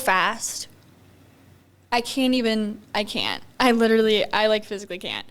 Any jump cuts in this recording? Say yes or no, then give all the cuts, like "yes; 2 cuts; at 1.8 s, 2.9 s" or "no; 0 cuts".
no; 0 cuts